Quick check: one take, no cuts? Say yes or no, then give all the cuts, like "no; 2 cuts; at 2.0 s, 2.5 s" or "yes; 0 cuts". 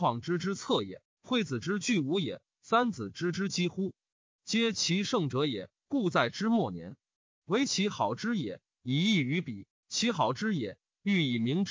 yes; 0 cuts